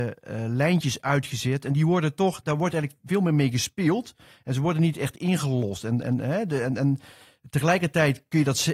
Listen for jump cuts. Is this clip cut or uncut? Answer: uncut